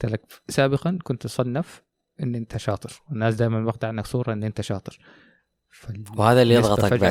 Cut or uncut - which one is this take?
uncut